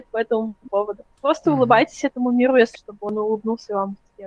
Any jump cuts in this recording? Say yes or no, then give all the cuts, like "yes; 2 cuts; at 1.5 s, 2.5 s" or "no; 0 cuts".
yes; 2 cuts; at 1.1 s, 2.7 s